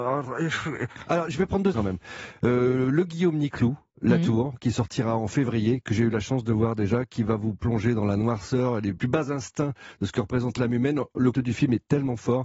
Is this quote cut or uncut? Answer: cut